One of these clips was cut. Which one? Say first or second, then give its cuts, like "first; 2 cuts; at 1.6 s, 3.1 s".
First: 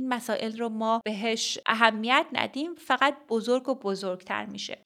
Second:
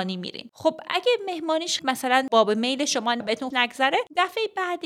second; 3 cuts; at 1.8 s, 3.2 s, 3.5 s